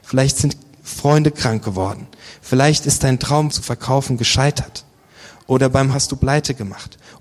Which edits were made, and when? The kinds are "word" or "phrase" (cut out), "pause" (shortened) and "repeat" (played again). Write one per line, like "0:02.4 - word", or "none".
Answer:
0:03.5 - word
0:05.9 - word